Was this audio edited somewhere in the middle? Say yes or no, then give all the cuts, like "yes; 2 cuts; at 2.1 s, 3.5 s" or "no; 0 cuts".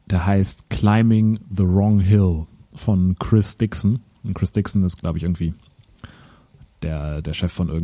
no; 0 cuts